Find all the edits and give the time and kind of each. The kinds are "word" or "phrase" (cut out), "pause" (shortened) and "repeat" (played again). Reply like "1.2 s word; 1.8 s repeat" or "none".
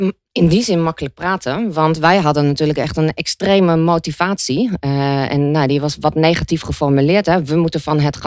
none